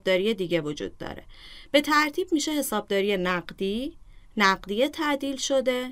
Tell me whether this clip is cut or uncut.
uncut